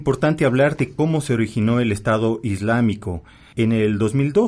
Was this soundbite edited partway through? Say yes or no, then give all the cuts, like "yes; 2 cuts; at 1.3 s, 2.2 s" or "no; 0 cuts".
no; 0 cuts